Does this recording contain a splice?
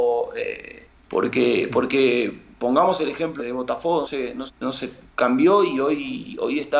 yes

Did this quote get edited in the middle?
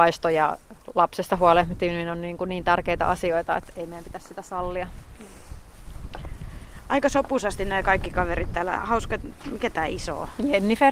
no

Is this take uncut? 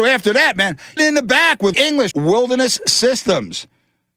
no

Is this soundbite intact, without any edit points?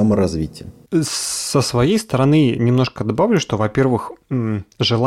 yes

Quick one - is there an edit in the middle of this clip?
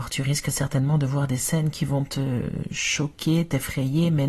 no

